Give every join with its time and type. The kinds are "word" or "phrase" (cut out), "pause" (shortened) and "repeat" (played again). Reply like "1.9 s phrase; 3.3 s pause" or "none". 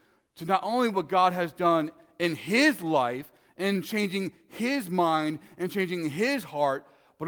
none